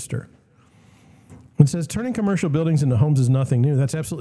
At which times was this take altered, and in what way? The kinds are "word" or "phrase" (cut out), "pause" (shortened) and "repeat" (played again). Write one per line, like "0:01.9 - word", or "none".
none